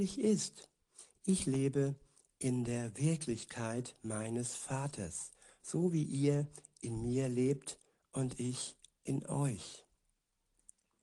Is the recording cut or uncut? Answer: uncut